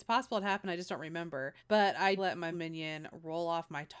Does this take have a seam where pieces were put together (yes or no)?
yes